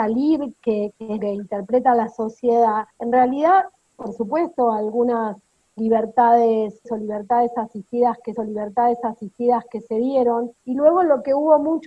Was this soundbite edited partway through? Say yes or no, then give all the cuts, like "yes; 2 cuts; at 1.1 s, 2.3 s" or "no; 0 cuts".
yes; 6 cuts; at 1.2 s, 2.9 s, 4.0 s, 6.8 s, 8.4 s, 10.6 s